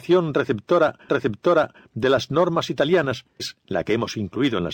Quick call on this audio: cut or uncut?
cut